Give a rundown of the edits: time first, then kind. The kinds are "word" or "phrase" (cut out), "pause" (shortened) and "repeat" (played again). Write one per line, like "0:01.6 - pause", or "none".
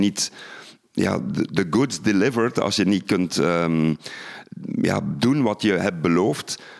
none